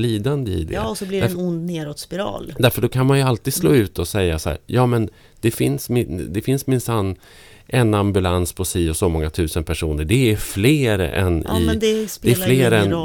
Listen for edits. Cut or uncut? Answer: uncut